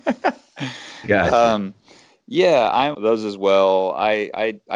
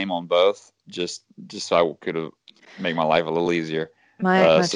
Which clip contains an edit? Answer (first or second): first